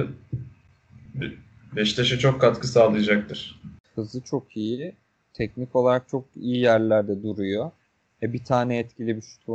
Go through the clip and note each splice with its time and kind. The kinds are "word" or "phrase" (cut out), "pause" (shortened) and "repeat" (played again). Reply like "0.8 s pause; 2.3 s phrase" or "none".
none